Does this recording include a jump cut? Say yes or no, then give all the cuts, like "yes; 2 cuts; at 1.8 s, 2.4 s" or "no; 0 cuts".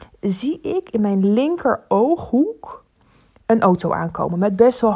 no; 0 cuts